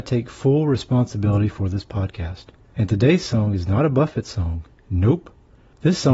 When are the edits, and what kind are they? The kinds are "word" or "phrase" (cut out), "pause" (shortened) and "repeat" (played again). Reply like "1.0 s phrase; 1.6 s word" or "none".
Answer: none